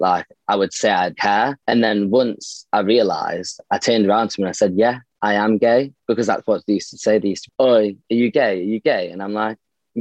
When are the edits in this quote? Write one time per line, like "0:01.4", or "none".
0:01.1
0:01.6
0:06.0
0:07.5